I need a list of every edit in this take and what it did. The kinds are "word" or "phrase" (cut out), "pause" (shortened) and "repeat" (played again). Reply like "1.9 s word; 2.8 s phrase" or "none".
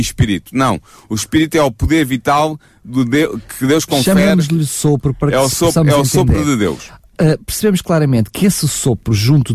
none